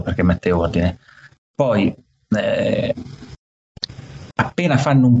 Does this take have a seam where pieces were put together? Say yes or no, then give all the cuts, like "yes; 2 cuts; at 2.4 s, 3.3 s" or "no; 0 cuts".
no; 0 cuts